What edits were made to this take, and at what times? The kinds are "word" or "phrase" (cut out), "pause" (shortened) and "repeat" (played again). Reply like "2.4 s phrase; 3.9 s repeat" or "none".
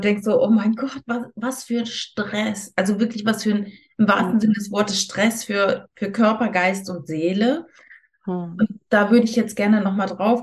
none